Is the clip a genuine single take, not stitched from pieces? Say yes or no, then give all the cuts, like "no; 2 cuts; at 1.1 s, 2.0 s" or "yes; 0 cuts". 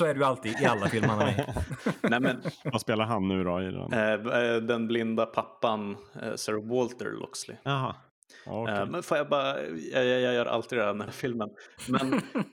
no; 1 cut; at 11.1 s